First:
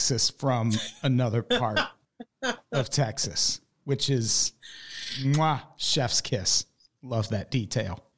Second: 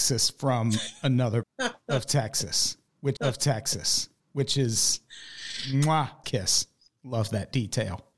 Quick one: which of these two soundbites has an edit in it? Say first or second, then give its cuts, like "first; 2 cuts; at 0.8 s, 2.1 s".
second; 3 cuts; at 1.4 s, 3.2 s, 6.2 s